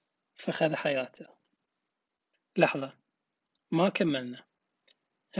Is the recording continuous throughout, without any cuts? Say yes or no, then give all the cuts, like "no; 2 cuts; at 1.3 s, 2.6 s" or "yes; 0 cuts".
no; 1 cut; at 1.9 s